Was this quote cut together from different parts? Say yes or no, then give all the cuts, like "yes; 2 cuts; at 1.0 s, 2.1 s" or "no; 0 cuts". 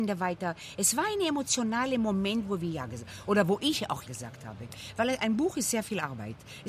yes; 1 cut; at 4.1 s